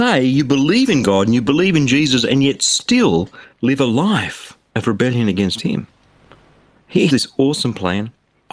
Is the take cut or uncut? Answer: cut